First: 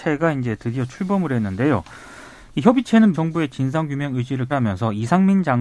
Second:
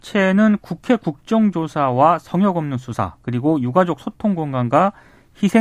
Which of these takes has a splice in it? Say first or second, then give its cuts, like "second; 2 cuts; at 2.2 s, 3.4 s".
first; 2 cuts; at 3.1 s, 4.5 s